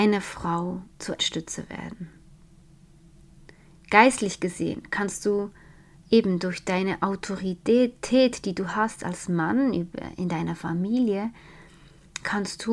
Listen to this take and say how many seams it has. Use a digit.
1